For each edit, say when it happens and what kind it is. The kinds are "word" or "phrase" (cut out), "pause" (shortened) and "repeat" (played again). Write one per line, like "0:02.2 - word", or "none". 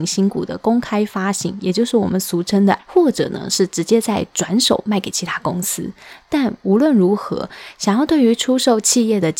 0:02.8 - word